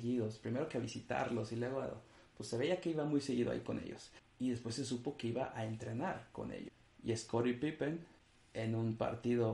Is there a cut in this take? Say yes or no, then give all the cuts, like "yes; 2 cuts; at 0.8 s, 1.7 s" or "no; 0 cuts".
no; 0 cuts